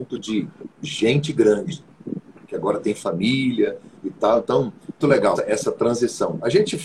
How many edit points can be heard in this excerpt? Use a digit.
3